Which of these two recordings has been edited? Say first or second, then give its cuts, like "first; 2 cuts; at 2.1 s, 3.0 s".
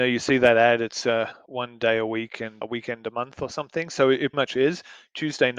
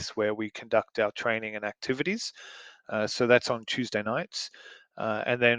first; 3 cuts; at 1.5 s, 2.6 s, 4.3 s